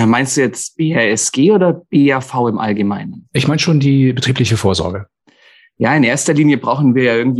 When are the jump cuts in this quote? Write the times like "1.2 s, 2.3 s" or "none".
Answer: none

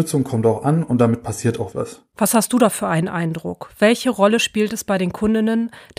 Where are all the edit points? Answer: 1.7 s

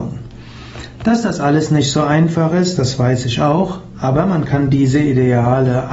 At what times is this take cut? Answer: none

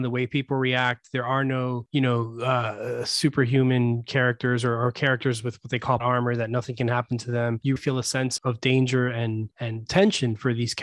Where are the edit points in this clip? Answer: 6.0 s, 7.8 s, 8.4 s, 9.9 s

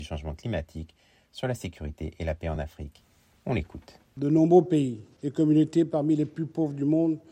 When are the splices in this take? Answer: none

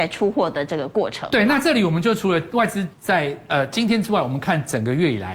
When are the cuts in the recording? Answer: 2.9 s

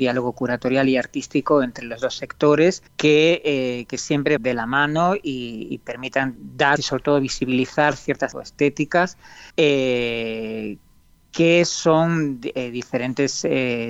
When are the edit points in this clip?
2.9 s, 4.4 s, 6.4 s, 6.8 s, 8.3 s, 9.5 s

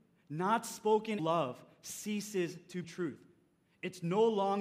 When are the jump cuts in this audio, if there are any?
1.2 s, 2.8 s

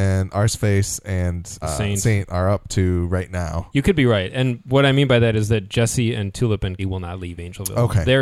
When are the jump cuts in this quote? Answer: 1.6 s, 6.8 s

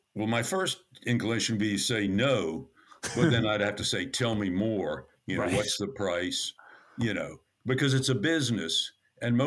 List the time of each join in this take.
none

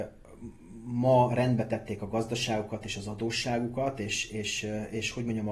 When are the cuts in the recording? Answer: none

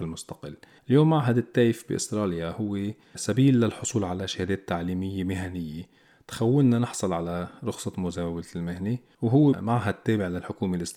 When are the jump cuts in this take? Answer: none

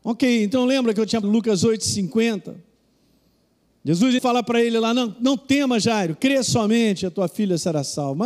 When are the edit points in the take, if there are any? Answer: 1.2 s, 4.2 s

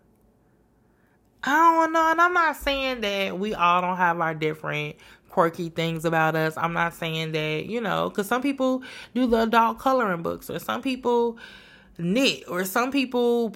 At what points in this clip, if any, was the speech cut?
none

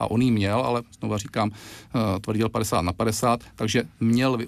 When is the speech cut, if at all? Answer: 0.9 s

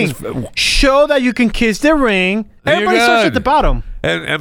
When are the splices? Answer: 2.6 s

